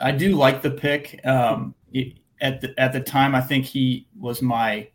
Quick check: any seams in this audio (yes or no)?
yes